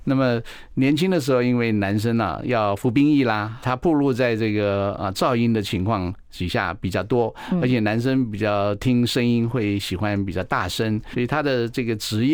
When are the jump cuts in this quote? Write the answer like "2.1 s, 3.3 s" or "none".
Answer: 3.6 s, 11.1 s